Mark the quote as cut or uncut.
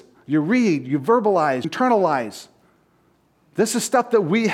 cut